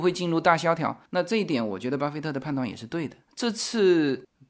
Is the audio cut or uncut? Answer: cut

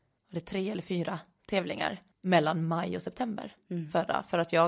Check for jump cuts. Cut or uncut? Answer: cut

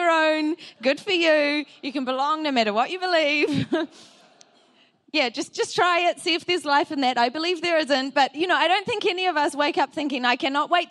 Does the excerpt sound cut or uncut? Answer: uncut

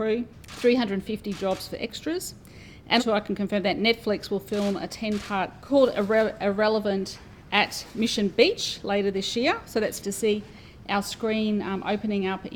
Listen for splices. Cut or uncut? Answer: cut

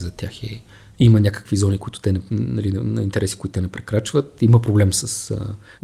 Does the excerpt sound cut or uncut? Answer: uncut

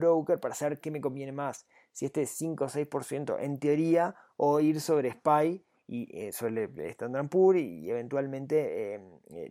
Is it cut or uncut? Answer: uncut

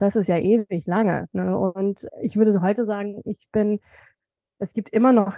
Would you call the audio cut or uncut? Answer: cut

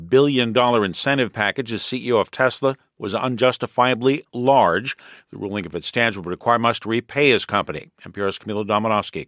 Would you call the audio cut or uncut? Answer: uncut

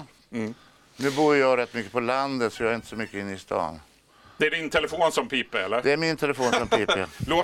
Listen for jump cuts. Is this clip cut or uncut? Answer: uncut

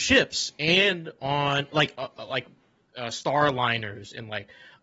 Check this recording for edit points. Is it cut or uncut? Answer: uncut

